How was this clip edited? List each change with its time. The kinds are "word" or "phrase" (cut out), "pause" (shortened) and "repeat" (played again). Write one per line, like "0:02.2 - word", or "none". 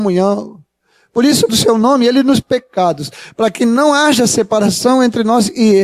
0:01.5 - phrase
0:02.4 - phrase